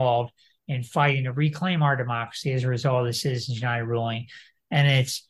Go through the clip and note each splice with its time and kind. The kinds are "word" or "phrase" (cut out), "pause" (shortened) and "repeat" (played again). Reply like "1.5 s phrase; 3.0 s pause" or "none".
none